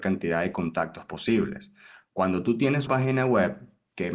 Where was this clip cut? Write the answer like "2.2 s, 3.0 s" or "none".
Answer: 2.9 s